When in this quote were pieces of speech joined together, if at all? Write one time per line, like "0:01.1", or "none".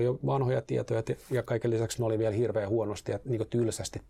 none